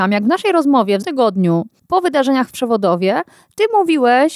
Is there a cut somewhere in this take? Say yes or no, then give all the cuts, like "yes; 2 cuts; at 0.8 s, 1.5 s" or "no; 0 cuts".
yes; 1 cut; at 1.0 s